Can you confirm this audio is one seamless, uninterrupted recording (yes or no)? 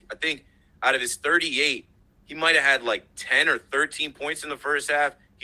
yes